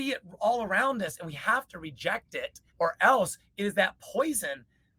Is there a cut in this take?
yes; 1 cut; at 2.7 s

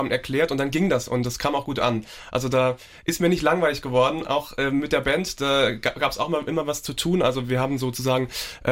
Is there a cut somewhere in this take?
no; 0 cuts

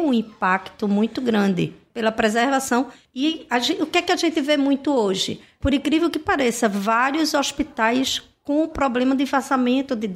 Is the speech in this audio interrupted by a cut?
no; 0 cuts

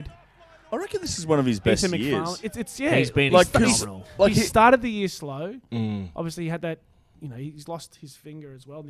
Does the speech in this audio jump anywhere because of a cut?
no; 0 cuts

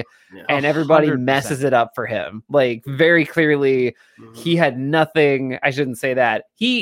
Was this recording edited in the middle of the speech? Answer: no; 0 cuts

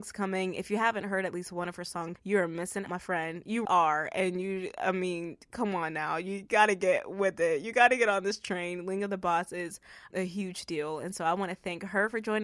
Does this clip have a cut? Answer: yes; 4 cuts; at 2.2 s, 2.9 s, 3.6 s, 10.1 s

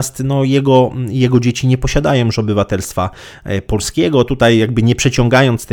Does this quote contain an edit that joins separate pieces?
no; 0 cuts

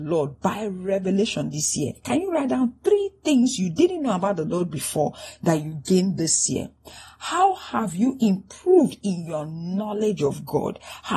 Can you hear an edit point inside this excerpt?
no; 0 cuts

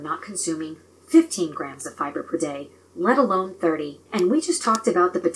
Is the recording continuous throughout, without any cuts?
no; 1 cut; at 4.1 s

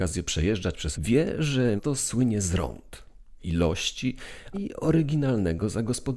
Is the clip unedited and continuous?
no; 4 cuts; at 0.9 s, 1.8 s, 3.4 s, 4.5 s

